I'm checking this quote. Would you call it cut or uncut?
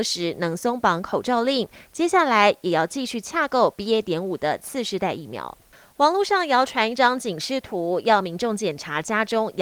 uncut